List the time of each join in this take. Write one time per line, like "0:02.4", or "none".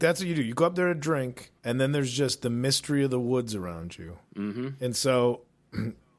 0:01.6
0:04.3